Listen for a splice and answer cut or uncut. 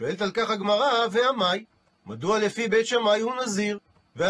uncut